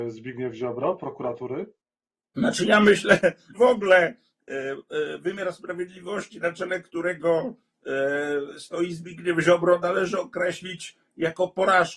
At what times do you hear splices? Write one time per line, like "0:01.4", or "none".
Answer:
0:03.5